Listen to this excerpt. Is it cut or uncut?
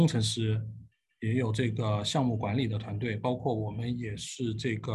uncut